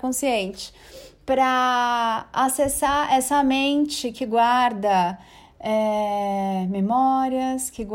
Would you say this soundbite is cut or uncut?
uncut